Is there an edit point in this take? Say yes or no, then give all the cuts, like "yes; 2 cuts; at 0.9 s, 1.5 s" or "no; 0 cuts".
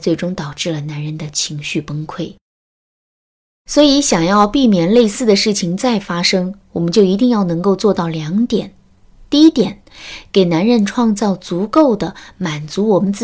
no; 0 cuts